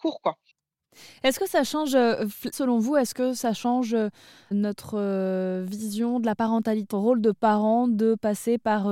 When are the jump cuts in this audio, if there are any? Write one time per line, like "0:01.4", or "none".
0:02.5
0:04.5
0:06.9